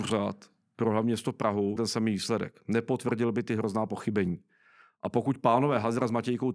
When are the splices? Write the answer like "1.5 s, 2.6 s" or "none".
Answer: 1.8 s